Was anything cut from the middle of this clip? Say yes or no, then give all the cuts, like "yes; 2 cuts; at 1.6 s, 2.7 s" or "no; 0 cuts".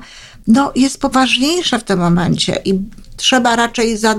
yes; 1 cut; at 1.1 s